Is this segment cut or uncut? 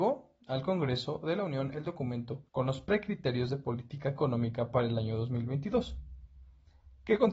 cut